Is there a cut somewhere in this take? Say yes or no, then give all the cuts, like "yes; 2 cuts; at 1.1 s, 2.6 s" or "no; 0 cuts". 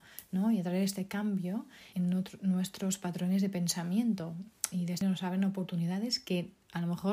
yes; 2 cuts; at 1.9 s, 5.0 s